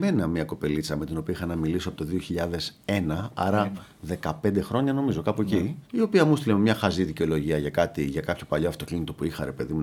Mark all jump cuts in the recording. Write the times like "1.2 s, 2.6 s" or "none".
5.8 s